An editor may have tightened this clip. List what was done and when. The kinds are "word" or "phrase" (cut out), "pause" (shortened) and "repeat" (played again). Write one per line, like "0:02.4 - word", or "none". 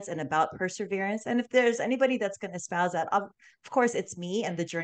none